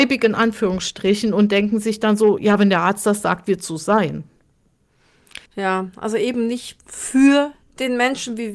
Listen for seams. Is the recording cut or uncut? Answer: cut